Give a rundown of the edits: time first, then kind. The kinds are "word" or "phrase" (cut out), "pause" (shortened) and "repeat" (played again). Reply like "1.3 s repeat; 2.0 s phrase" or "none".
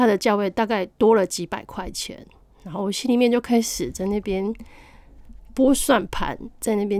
none

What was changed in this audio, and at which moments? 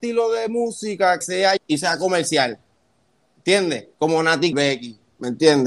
1.2 s word; 1.6 s word; 3.9 s pause; 4.5 s word

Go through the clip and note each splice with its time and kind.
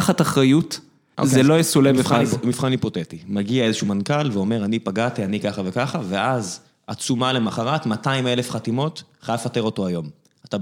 1.1 s word

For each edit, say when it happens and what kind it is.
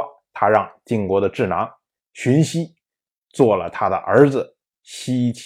none

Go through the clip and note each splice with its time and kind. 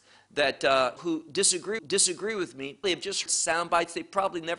1.0 s phrase; 1.8 s repeat; 2.8 s word; 3.3 s word

